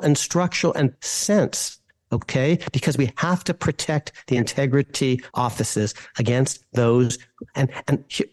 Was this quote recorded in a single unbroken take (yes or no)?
no